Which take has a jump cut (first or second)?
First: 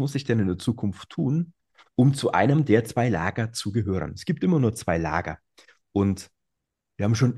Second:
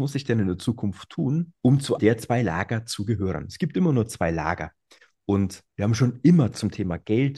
second